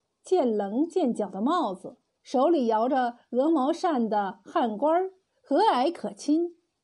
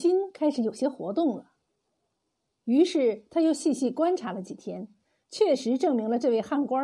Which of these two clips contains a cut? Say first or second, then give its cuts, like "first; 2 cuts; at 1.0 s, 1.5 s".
first; 1 cut; at 2.1 s